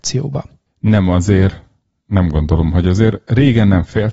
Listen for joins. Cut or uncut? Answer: uncut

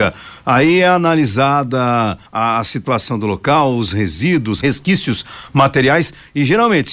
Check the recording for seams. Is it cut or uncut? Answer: cut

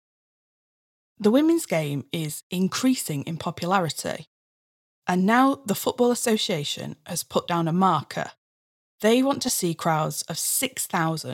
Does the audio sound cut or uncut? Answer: uncut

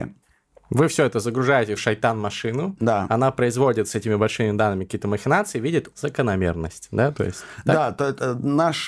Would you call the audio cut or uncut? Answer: cut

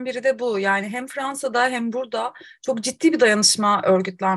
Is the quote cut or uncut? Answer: uncut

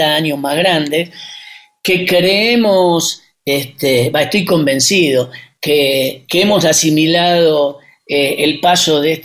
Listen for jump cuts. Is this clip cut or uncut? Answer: uncut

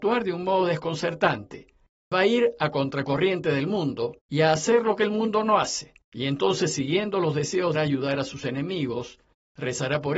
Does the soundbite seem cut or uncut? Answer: cut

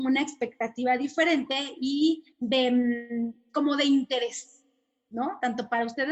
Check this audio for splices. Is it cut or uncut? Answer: cut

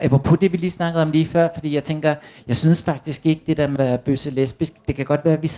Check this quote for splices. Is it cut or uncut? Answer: cut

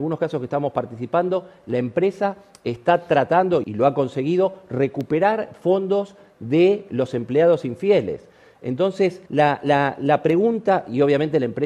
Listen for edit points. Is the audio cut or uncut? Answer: cut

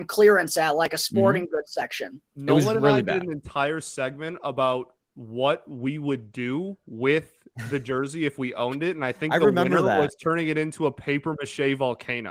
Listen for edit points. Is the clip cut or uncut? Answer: cut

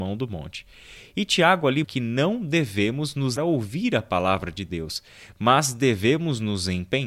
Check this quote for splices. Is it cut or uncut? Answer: cut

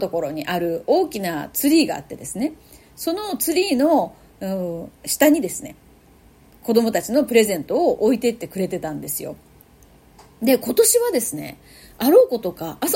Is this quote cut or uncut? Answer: cut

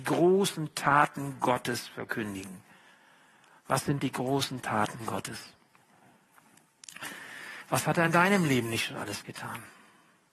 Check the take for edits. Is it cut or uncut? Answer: uncut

